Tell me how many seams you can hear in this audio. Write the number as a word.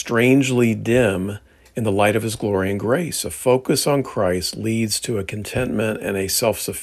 zero